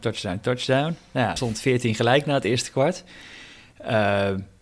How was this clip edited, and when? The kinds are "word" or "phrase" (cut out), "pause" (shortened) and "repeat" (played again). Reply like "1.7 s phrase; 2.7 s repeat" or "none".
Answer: 1.4 s word